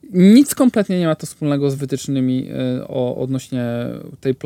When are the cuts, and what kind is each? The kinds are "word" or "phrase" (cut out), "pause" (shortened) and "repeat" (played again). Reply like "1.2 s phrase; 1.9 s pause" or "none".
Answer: none